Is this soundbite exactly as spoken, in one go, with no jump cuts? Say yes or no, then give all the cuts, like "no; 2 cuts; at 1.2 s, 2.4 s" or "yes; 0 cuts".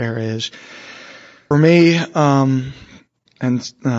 no; 1 cut; at 1.5 s